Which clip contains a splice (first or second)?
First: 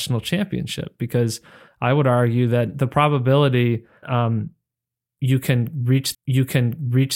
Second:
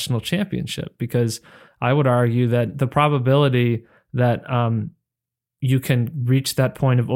first